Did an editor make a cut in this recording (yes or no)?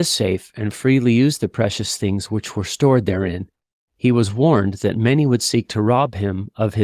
no